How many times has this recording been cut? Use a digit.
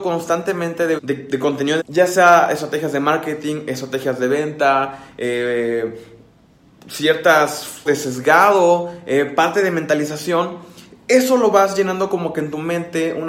3